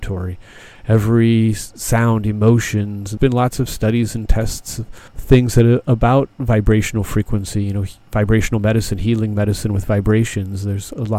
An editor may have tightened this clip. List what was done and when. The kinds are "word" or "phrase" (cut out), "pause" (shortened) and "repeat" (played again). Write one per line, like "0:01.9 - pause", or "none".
0:03.2 - word
0:05.1 - pause